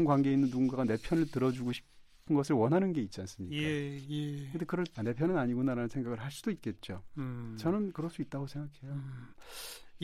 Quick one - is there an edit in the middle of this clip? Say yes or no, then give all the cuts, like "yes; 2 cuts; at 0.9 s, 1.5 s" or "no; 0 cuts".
yes; 1 cut; at 4.9 s